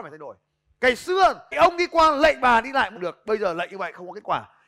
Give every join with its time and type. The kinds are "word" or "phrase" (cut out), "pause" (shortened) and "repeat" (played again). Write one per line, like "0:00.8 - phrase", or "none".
0:01.5 - word
0:03.0 - word

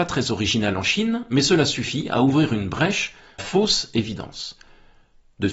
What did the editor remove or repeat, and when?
0:03.4 - phrase

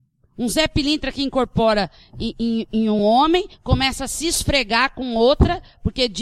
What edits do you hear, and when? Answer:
none

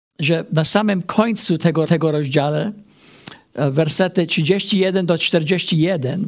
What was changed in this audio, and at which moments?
0:01.8 - repeat

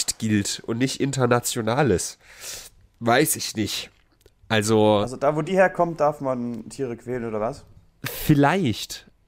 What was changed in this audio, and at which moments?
none

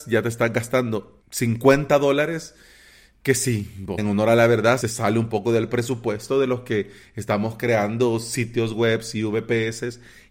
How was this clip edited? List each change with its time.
0:01.2 - pause
0:04.0 - word
0:04.8 - word

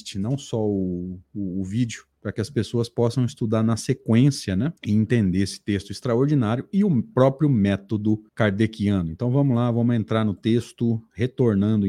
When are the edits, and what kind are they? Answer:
0:02.1 - pause
0:04.8 - pause
0:08.3 - pause

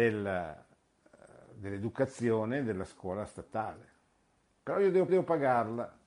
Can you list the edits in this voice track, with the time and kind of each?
0:05.1 - repeat

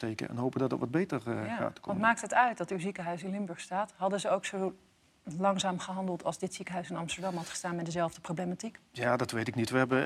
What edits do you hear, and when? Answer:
none

